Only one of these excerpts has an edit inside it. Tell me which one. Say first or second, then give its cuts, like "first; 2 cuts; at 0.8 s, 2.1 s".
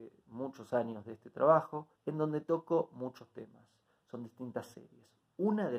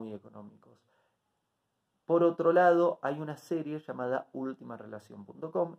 first; 1 cut; at 2.0 s